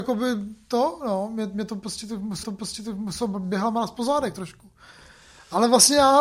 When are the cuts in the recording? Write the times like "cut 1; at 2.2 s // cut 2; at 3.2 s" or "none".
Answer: cut 1; at 2.4 s